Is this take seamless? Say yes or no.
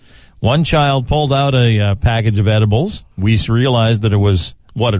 no